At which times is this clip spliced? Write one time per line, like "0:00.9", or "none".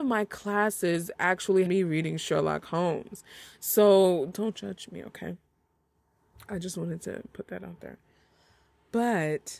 0:01.7
0:04.3